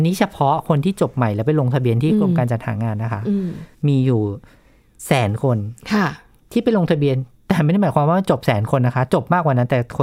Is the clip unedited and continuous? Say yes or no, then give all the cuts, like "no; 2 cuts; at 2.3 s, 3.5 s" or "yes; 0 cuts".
yes; 0 cuts